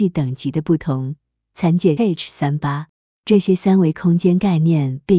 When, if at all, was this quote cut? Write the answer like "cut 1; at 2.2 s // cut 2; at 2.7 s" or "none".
cut 1; at 2.0 s